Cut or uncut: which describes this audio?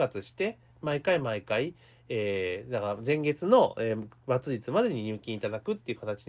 uncut